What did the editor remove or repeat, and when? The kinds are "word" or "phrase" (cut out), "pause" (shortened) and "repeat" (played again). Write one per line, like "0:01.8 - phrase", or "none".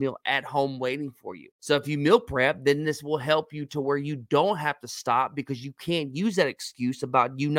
0:01.5 - pause